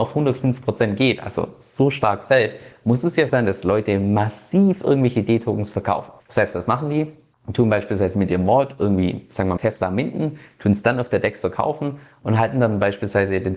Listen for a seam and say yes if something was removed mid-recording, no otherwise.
yes